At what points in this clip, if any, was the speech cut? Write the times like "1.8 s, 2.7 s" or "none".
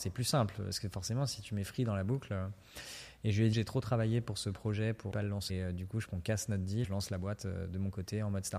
3.5 s, 5.1 s, 5.5 s, 6.1 s, 6.8 s